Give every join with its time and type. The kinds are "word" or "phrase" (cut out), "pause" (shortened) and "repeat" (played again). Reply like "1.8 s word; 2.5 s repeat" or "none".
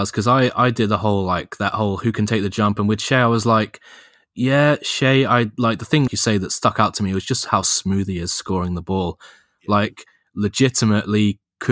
6.1 s word